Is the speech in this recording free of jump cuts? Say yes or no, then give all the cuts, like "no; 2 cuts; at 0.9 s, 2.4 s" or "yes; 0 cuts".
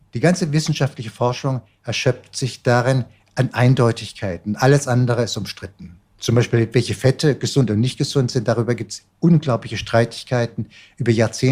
no; 2 cuts; at 6.1 s, 9.1 s